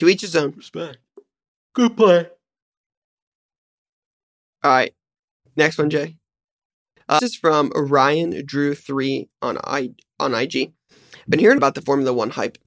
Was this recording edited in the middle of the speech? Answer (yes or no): yes